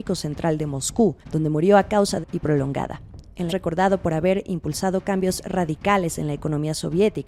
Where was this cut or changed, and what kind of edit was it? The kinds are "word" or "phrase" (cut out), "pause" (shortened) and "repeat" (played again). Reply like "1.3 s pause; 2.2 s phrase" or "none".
1.2 s pause; 2.2 s phrase; 3.5 s phrase